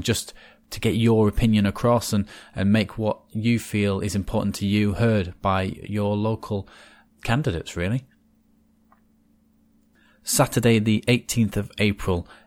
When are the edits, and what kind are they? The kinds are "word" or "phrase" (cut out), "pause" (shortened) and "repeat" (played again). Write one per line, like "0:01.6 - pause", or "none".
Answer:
none